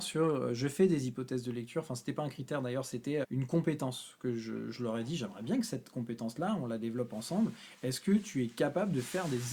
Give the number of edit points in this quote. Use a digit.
1